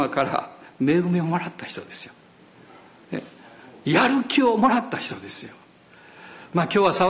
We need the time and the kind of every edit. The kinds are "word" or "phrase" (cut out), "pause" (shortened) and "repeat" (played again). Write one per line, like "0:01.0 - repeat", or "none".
none